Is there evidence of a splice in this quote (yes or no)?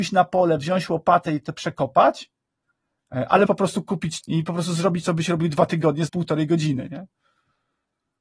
yes